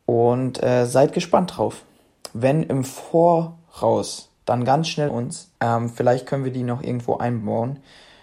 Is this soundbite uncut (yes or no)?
no